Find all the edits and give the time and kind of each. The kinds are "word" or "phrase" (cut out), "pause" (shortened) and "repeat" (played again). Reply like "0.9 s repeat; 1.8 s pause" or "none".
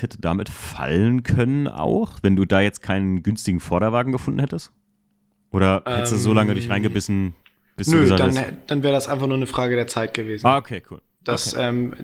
none